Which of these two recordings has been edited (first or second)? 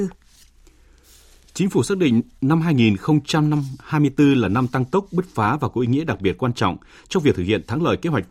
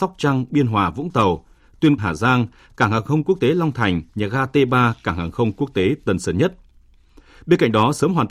second